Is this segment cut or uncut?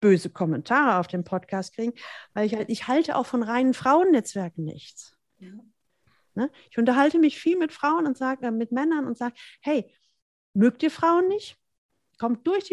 uncut